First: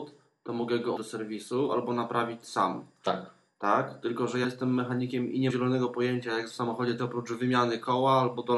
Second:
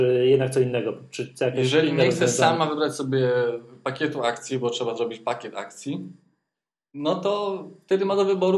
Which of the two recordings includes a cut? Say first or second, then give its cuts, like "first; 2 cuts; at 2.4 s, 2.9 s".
first; 5 cuts; at 1.0 s, 4.4 s, 5.5 s, 6.5 s, 7.0 s